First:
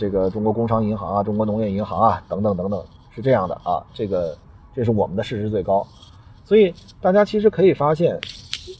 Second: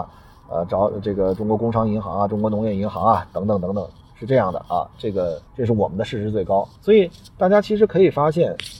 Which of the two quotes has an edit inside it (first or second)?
second